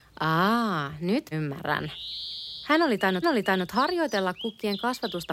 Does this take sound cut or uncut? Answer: cut